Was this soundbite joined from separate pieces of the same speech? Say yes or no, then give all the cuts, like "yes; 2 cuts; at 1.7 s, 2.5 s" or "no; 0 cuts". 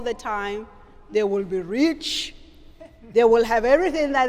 no; 0 cuts